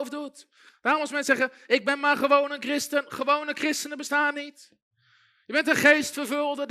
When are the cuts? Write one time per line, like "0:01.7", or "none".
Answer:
none